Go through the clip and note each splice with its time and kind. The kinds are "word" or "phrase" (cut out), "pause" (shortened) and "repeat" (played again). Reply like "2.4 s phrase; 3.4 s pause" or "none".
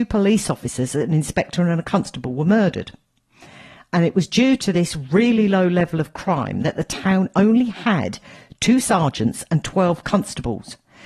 none